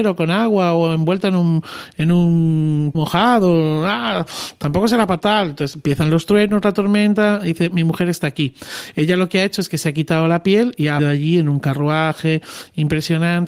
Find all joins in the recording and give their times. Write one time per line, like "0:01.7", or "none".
0:02.9
0:05.2
0:07.7
0:11.0